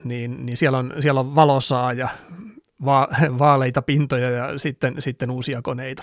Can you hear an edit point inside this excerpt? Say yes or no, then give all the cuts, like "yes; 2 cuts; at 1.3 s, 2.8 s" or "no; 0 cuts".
no; 0 cuts